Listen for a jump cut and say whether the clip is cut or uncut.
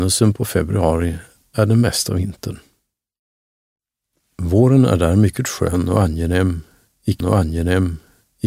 cut